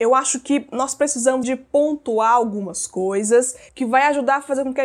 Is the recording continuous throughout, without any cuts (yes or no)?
no